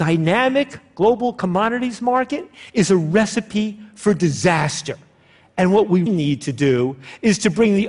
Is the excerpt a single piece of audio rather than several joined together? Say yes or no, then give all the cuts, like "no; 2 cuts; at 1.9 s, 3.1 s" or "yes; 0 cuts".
no; 1 cut; at 6.1 s